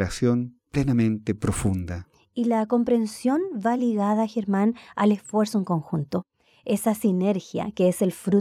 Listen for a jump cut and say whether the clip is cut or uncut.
uncut